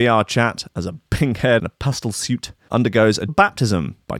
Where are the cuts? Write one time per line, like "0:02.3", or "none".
0:01.1
0:01.6
0:02.7
0:03.3